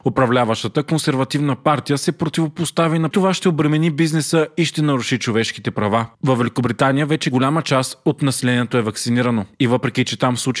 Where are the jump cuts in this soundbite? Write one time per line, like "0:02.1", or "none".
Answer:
0:03.1